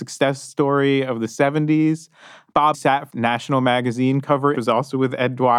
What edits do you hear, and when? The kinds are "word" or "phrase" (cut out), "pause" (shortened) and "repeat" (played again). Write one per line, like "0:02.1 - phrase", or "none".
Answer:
0:02.7 - word
0:03.1 - phrase
0:04.5 - phrase